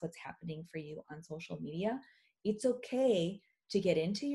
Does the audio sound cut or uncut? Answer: uncut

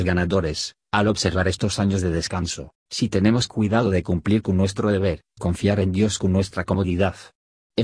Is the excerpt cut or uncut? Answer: cut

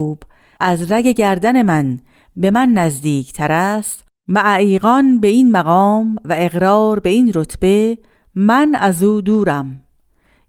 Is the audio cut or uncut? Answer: uncut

